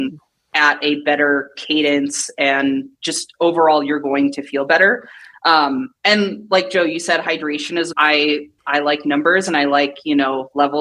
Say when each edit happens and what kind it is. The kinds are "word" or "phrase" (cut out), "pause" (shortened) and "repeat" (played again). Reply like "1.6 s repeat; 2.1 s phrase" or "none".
6.0 s pause; 7.9 s phrase; 8.6 s pause